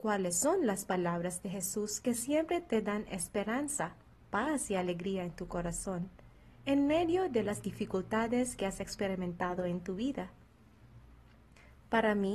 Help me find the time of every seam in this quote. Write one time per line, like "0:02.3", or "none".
none